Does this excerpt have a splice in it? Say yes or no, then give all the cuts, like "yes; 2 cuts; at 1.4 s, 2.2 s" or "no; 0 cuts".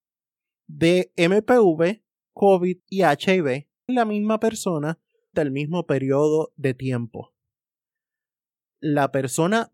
yes; 3 cuts; at 2.8 s, 3.9 s, 5.3 s